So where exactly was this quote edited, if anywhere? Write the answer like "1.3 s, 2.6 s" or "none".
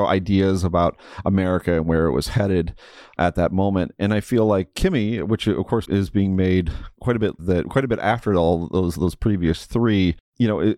5.8 s, 7.4 s